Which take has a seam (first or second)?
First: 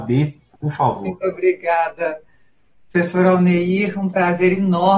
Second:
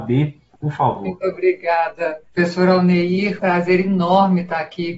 second